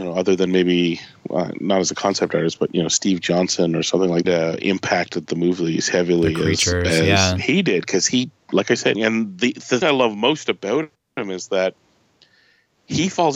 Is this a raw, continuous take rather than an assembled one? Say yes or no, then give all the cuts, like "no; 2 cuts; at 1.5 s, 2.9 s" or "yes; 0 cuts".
no; 3 cuts; at 4.2 s, 8.9 s, 9.8 s